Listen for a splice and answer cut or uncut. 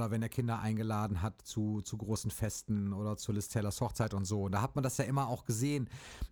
uncut